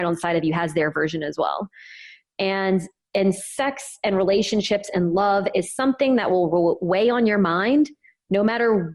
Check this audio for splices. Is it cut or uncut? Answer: uncut